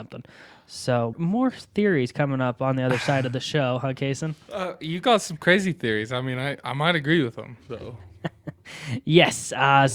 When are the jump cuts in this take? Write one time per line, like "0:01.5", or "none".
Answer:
0:01.1